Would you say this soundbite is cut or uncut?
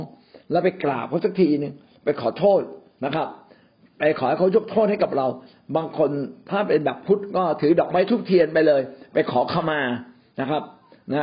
uncut